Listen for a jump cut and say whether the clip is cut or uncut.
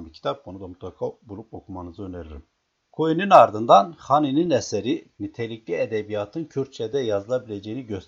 uncut